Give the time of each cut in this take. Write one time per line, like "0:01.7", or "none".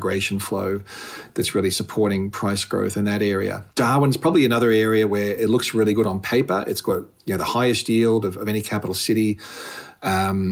0:03.7